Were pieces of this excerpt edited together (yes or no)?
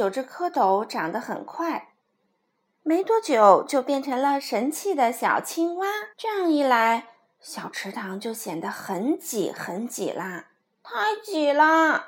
yes